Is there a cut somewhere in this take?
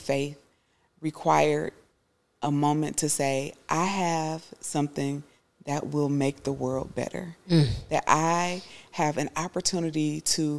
no; 0 cuts

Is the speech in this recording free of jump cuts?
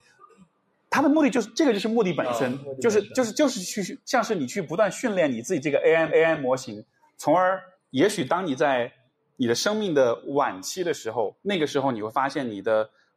no; 2 cuts; at 6.1 s, 7.7 s

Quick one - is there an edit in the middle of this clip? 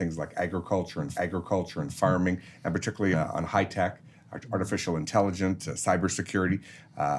yes; 2 cuts; at 1.1 s, 3.1 s

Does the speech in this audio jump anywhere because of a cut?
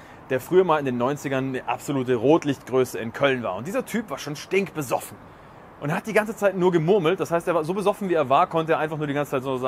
no; 0 cuts

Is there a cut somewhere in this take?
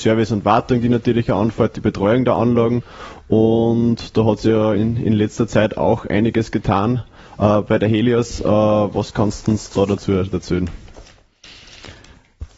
yes; 1 cut; at 4.8 s

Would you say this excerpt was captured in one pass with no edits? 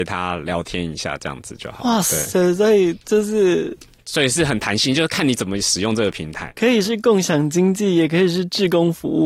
yes; 0 cuts

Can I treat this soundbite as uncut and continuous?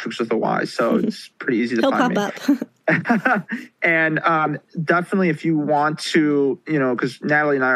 yes; 0 cuts

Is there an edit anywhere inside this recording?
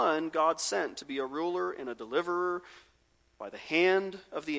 no; 0 cuts

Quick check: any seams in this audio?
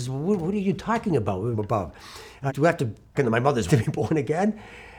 yes; 4 cuts; at 1.5 s, 2.5 s, 3.1 s, 3.7 s

